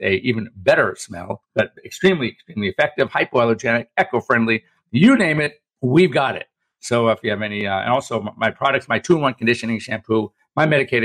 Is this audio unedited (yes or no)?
no